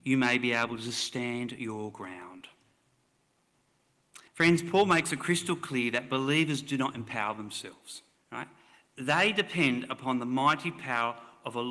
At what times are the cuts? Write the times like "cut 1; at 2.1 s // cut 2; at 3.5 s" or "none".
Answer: cut 1; at 4.3 s // cut 2; at 8.2 s

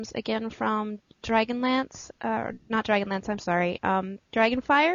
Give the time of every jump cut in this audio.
none

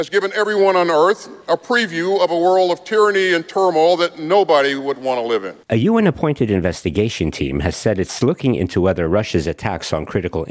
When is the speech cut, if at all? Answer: cut 1; at 1.4 s // cut 2; at 5.6 s

